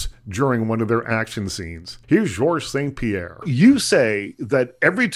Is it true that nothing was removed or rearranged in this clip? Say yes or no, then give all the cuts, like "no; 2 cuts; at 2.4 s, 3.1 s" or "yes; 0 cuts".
no; 1 cut; at 2.0 s